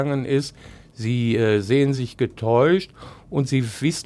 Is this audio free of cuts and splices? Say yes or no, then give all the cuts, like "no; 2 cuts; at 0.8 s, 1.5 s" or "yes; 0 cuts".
yes; 0 cuts